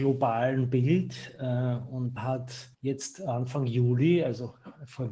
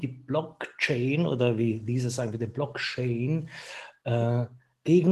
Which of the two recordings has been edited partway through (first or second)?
first